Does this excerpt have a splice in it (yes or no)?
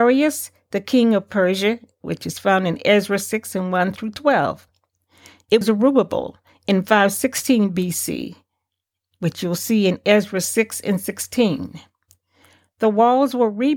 yes